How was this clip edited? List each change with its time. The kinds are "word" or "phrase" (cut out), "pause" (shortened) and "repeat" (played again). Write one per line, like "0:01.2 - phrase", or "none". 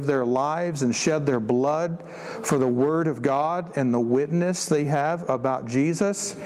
none